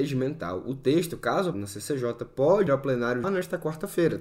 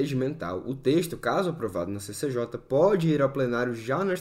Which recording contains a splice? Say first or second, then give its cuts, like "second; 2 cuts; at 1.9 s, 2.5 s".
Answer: first; 3 cuts; at 1.5 s, 2.7 s, 3.2 s